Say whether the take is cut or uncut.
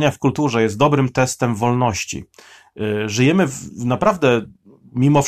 uncut